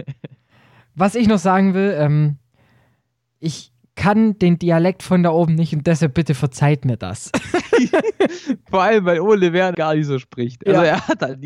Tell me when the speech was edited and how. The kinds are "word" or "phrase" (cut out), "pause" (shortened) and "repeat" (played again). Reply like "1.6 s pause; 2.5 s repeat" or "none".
9.7 s word